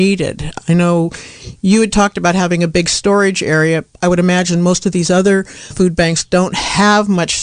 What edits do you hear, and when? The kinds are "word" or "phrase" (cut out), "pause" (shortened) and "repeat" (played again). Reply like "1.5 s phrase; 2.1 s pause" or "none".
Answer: 5.7 s word